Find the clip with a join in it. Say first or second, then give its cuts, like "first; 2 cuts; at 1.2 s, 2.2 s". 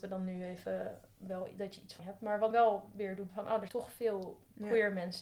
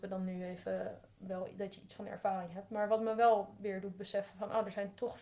first; 4 cuts; at 2.0 s, 2.5 s, 3.3 s, 3.7 s